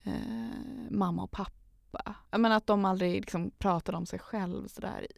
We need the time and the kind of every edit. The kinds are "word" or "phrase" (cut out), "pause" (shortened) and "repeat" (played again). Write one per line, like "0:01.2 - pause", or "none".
0:02.2 - pause

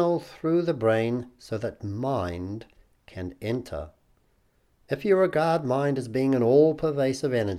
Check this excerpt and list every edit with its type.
none

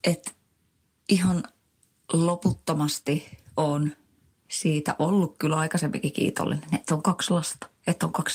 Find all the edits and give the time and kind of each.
none

